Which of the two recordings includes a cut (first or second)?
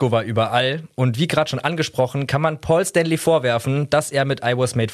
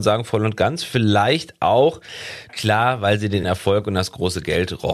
second